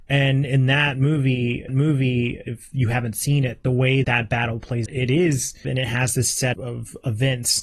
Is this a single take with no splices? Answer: no; 5 cuts; at 1.7 s, 4.0 s, 4.9 s, 5.6 s, 6.5 s

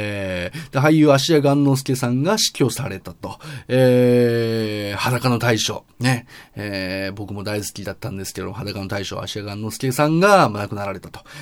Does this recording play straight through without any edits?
no; 1 cut; at 5.9 s

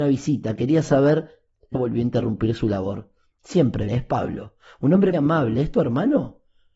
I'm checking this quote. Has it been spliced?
yes; 3 cuts; at 1.8 s, 3.9 s, 5.1 s

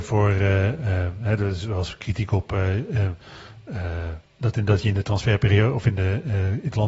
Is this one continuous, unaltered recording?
no; 1 cut; at 4.3 s

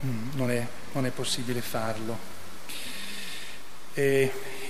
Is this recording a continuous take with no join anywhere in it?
yes; 0 cuts

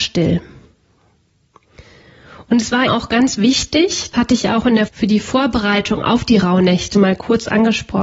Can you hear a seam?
yes; 4 cuts; at 2.9 s, 4.1 s, 4.9 s, 6.9 s

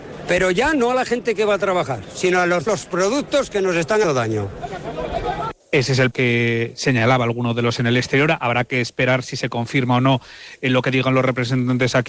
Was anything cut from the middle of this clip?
yes; 5 cuts; at 2.7 s, 4.0 s, 5.6 s, 6.1 s, 7.8 s

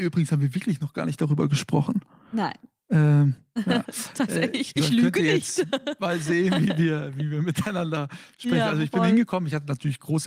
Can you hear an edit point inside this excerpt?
yes; 1 cut; at 4.8 s

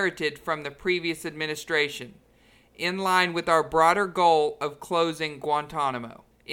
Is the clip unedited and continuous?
yes; 0 cuts

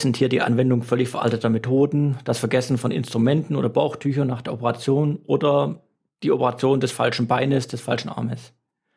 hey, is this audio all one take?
yes; 0 cuts

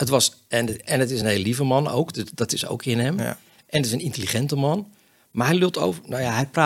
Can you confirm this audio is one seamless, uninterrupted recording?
yes; 0 cuts

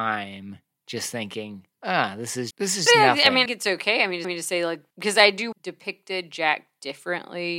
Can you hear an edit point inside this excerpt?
yes; 7 cuts; at 1.7 s, 2.5 s, 2.9 s, 3.5 s, 4.2 s, 4.9 s, 5.5 s

